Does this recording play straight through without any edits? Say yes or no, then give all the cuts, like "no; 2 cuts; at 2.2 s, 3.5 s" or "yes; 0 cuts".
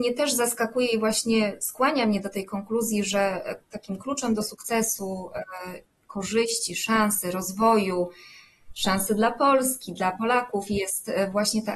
no; 1 cut; at 3.6 s